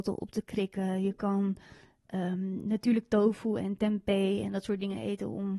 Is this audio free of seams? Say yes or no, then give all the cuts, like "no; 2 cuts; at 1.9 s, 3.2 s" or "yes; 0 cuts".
yes; 0 cuts